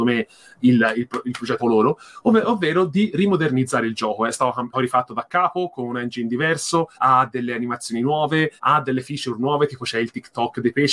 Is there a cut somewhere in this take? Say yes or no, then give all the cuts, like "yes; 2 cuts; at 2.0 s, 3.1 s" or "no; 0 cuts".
yes; 4 cuts; at 1.6 s, 4.7 s, 6.9 s, 8.6 s